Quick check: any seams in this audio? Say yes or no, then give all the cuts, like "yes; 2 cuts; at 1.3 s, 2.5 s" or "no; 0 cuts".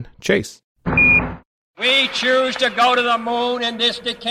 no; 0 cuts